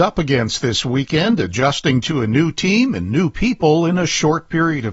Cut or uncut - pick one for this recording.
uncut